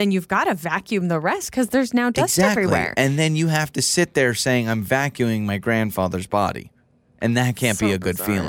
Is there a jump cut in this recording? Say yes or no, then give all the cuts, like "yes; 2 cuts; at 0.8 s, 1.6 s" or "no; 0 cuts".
no; 0 cuts